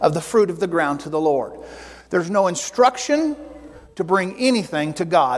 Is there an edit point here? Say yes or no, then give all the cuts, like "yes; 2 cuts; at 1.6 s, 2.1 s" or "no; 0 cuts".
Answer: no; 0 cuts